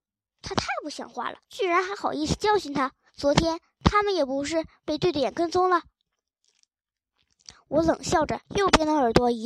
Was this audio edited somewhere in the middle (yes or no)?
yes